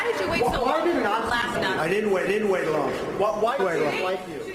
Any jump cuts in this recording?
yes; 3 cuts; at 1.5 s, 2.3 s, 3.6 s

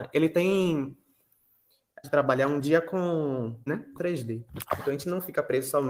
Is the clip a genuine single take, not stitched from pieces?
no; 3 cuts; at 2.0 s, 3.7 s, 4.0 s

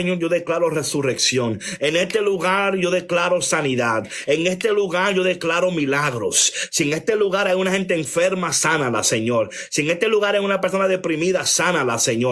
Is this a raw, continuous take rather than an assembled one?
yes; 0 cuts

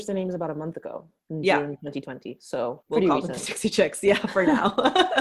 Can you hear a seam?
yes; 1 cut; at 2.8 s

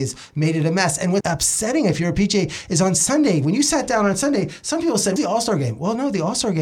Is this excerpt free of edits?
no; 2 cuts; at 1.2 s, 5.2 s

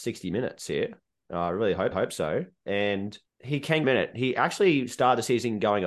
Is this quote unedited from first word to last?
no; 3 cuts; at 1.9 s, 3.3 s, 3.8 s

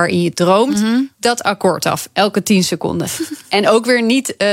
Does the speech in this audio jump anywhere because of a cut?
no; 0 cuts

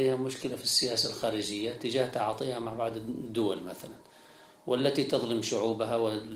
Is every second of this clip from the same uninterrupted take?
yes; 0 cuts

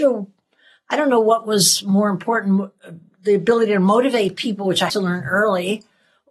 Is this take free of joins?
no; 1 cut; at 4.9 s

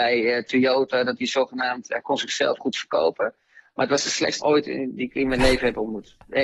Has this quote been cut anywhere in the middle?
yes; 2 cuts; at 2.6 s, 4.4 s

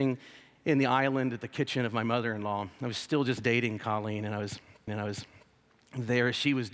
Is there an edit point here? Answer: yes; 1 cut; at 4.9 s

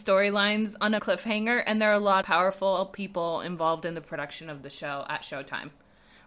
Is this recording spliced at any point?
yes; 2 cuts; at 1.0 s, 2.2 s

